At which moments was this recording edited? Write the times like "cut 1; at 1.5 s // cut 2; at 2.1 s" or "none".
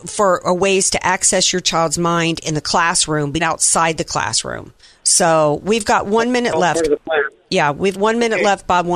cut 1; at 3.4 s // cut 2; at 4.8 s // cut 3; at 7.9 s